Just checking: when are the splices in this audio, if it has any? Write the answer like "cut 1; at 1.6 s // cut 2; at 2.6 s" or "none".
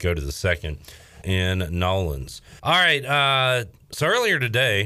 cut 1; at 1.2 s // cut 2; at 2.6 s